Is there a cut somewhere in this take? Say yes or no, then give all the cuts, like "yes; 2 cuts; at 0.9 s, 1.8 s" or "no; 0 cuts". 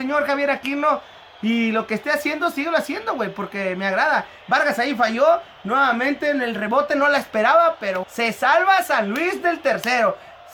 yes; 1 cut; at 8.0 s